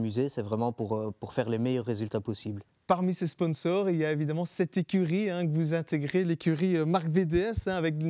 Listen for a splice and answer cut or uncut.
cut